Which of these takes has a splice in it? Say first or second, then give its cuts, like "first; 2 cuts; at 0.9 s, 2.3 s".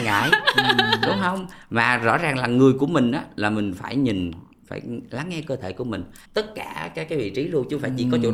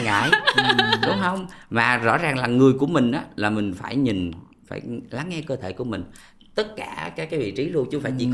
first; 1 cut; at 6.2 s